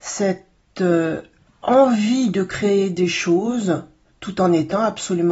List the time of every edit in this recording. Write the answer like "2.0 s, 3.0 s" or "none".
none

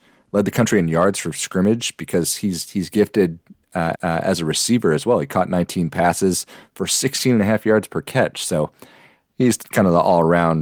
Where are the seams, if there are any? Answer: 3.9 s

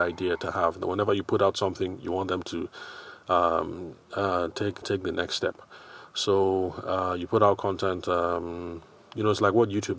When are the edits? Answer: 4.8 s

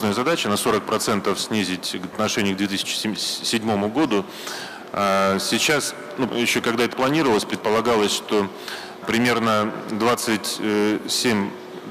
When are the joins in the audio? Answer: 2.1 s, 6.3 s, 6.9 s, 9.0 s

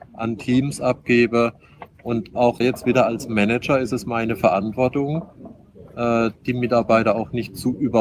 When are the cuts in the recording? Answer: 2.6 s

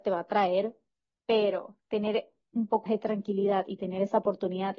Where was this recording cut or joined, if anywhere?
2.5 s, 2.9 s

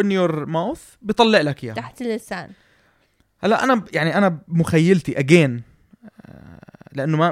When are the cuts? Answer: none

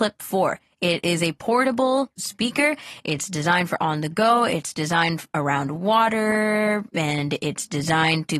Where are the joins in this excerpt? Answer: 2.2 s

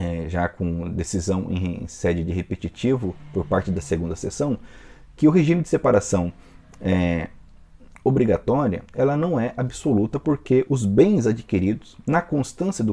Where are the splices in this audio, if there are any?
none

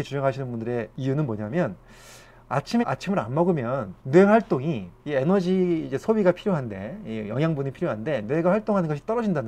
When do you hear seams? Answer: 2.8 s, 4.0 s, 5.0 s

